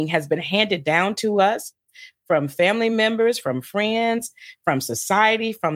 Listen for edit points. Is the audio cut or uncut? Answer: uncut